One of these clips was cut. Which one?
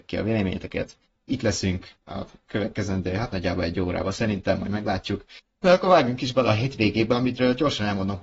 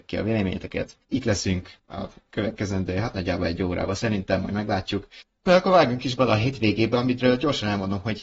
second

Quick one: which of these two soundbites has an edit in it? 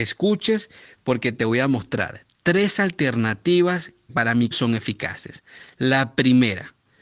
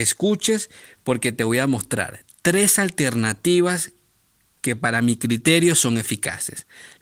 first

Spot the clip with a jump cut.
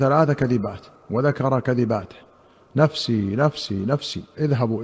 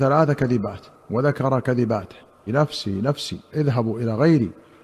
second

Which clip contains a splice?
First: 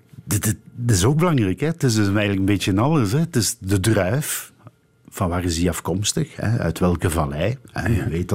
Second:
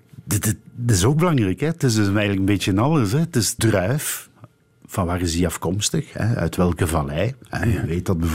second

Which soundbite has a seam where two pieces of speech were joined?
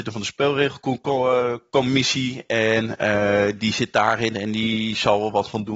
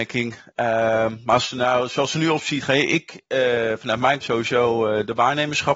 second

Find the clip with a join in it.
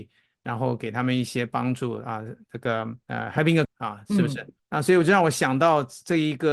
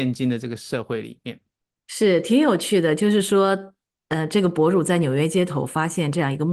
first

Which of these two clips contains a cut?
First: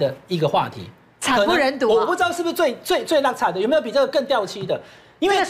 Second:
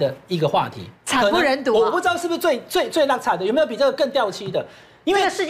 second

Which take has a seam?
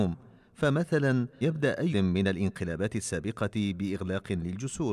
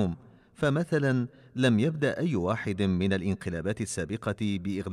first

